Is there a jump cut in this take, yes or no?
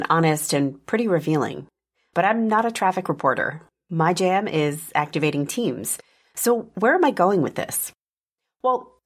no